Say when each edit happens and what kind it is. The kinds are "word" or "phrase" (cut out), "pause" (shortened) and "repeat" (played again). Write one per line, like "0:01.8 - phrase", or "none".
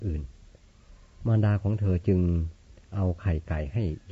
none